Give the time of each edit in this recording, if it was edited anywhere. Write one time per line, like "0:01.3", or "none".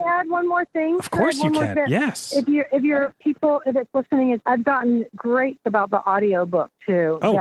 0:01.7
0:03.7
0:04.4
0:05.6